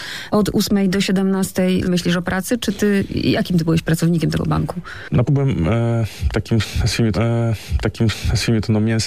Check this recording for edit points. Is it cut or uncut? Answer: cut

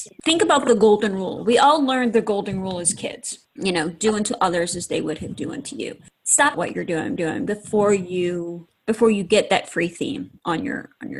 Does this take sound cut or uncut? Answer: cut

